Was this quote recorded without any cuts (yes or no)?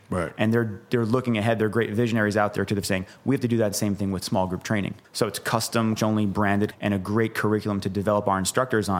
no